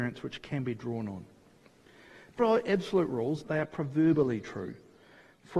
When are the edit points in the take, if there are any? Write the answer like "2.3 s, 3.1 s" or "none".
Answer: 2.4 s, 3.4 s